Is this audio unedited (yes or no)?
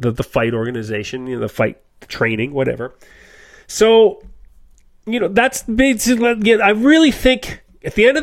yes